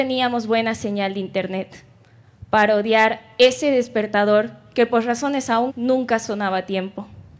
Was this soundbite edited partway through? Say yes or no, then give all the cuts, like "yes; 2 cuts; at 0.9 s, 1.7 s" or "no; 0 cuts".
yes; 1 cut; at 5.7 s